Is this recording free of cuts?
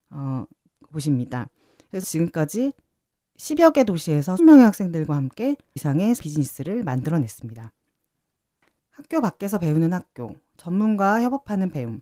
no; 4 cuts; at 2.0 s, 4.4 s, 5.8 s, 6.2 s

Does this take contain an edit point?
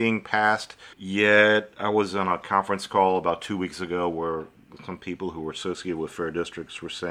yes; 1 cut; at 0.9 s

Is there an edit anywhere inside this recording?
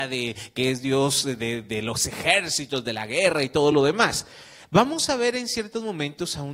no; 0 cuts

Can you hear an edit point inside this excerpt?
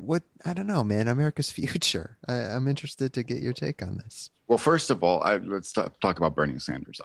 yes; 1 cut; at 4.4 s

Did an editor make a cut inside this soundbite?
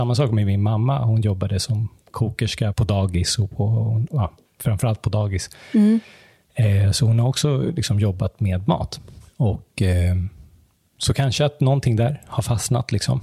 no; 0 cuts

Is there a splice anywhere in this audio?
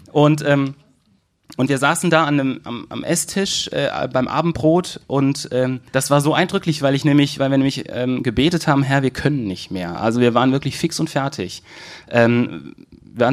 yes; 1 cut; at 5.9 s

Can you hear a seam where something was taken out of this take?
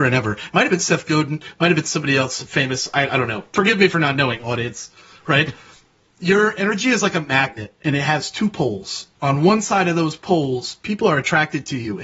no; 0 cuts

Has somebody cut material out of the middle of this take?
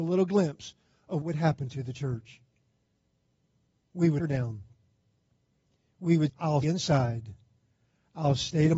yes; 4 cuts; at 1.2 s, 4.2 s, 6.3 s, 6.6 s

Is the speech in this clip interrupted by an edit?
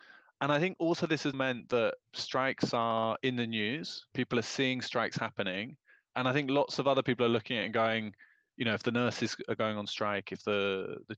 yes; 1 cut; at 1.3 s

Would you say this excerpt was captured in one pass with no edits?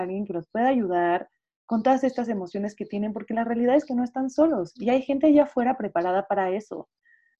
yes; 0 cuts

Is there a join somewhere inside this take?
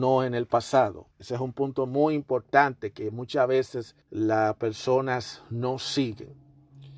yes; 2 cuts; at 1.1 s, 4.0 s

